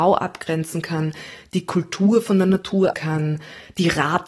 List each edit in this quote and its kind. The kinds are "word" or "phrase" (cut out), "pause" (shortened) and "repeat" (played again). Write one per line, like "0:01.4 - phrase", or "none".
0:02.9 - word